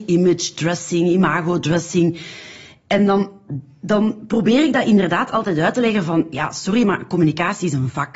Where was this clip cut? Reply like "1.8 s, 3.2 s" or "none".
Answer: none